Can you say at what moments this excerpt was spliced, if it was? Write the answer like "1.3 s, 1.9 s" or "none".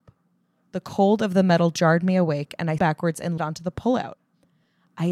2.8 s, 3.4 s